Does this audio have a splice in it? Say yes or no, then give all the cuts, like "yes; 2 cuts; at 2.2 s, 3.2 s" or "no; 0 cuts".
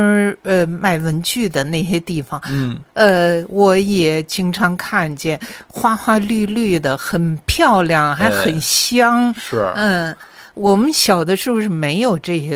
no; 0 cuts